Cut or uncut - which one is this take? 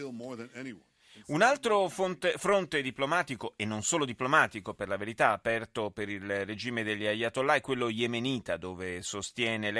uncut